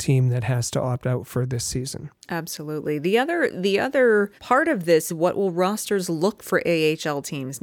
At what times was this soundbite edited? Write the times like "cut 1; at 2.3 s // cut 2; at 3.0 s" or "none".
cut 1; at 4.4 s // cut 2; at 5.1 s // cut 3; at 6.4 s